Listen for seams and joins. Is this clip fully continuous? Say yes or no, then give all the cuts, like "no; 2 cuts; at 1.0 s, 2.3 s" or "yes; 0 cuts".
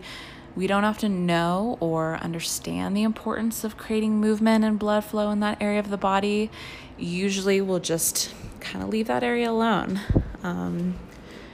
yes; 0 cuts